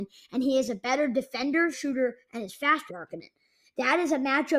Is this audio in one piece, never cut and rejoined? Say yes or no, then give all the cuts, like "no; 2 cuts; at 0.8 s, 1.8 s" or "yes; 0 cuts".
no; 2 cuts; at 1.7 s, 2.9 s